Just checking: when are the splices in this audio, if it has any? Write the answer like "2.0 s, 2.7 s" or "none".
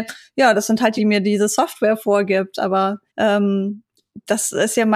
1.0 s, 3.1 s